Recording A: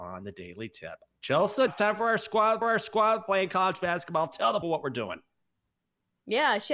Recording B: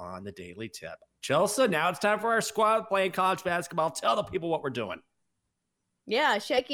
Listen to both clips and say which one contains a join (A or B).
A